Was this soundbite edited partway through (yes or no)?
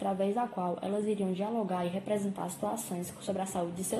no